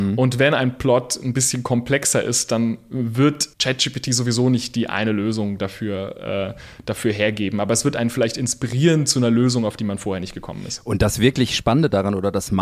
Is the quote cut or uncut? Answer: cut